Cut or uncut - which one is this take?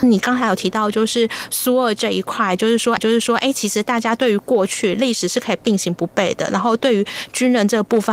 cut